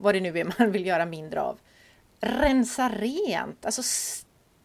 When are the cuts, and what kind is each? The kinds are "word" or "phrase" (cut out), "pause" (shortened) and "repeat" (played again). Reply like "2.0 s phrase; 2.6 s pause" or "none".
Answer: none